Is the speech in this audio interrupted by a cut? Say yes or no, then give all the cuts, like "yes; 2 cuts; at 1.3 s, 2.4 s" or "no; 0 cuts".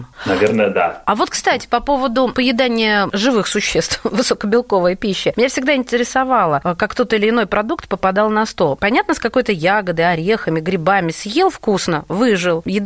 no; 0 cuts